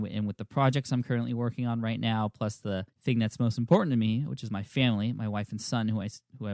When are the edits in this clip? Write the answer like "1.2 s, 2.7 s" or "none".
2.9 s